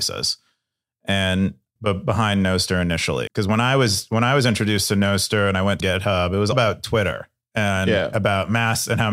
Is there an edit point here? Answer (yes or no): yes